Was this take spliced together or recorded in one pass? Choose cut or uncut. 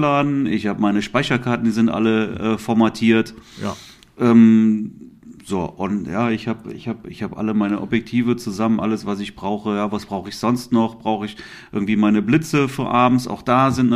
uncut